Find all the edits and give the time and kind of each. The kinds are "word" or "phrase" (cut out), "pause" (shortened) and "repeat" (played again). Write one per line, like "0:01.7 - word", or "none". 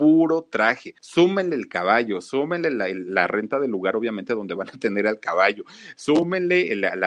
0:01.0 - pause